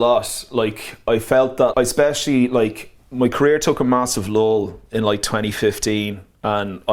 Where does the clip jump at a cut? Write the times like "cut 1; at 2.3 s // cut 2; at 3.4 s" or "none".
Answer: cut 1; at 1.7 s